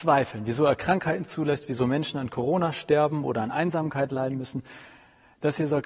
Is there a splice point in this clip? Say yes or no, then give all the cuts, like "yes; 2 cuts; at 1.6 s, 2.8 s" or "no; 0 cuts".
no; 0 cuts